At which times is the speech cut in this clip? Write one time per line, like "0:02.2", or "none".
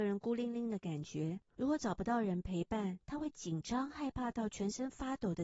0:01.5